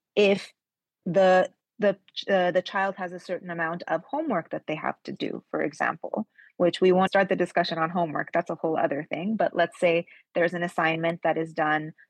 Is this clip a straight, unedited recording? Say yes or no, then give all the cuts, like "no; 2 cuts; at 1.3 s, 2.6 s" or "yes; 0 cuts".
no; 1 cut; at 7.1 s